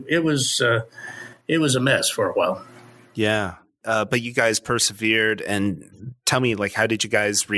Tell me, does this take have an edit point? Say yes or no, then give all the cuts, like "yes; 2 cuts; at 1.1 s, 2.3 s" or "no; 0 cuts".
no; 0 cuts